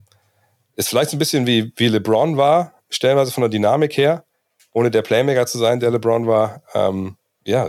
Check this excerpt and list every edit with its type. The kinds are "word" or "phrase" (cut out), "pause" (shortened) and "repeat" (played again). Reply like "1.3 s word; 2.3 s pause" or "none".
none